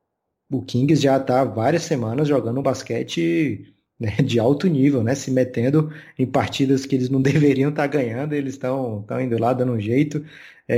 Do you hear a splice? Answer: no; 0 cuts

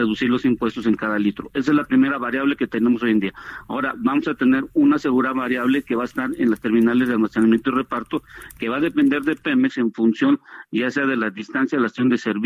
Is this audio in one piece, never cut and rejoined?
yes; 0 cuts

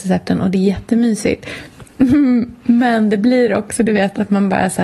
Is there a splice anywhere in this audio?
no; 0 cuts

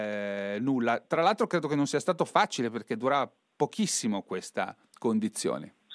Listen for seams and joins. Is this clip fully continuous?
yes; 0 cuts

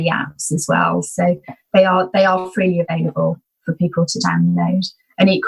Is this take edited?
no; 0 cuts

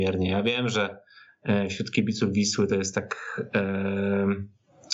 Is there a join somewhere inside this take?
no; 0 cuts

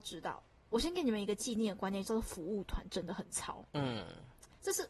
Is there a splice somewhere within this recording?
yes; 1 cut; at 3.7 s

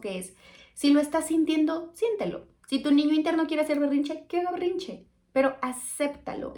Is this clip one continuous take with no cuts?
yes; 0 cuts

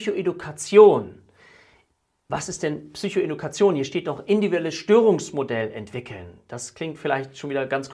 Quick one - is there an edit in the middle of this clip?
no; 0 cuts

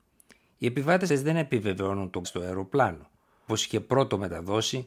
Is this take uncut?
no; 3 cuts; at 1.1 s, 2.2 s, 3.5 s

